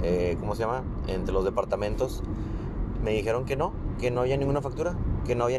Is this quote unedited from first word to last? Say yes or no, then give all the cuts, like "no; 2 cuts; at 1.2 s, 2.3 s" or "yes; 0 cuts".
yes; 0 cuts